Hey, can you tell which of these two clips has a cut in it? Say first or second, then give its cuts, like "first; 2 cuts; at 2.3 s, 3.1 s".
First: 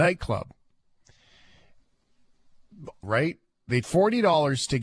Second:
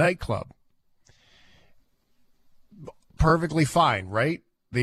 first; 2 cuts; at 3.0 s, 3.8 s